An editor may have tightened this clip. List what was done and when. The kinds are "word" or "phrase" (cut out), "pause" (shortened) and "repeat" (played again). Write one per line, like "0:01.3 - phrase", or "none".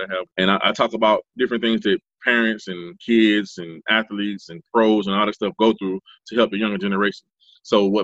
none